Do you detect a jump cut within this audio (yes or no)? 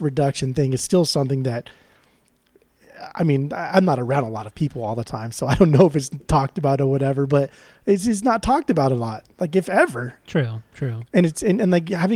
no